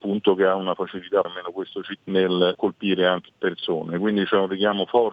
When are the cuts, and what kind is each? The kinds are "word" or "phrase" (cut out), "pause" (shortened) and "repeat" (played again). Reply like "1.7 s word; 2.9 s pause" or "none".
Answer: 1.2 s word; 2.0 s word; 2.5 s word; 3.3 s word